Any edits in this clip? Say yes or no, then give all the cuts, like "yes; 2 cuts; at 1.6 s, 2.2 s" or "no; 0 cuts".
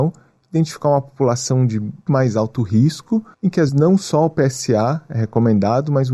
yes; 3 cuts; at 2.1 s, 3.3 s, 3.7 s